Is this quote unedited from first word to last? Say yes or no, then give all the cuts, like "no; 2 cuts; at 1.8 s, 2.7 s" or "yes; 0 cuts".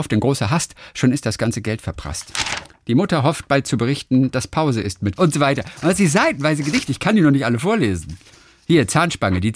no; 1 cut; at 5.2 s